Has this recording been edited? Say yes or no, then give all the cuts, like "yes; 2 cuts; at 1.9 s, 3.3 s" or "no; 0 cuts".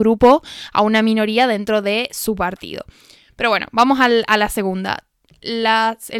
no; 0 cuts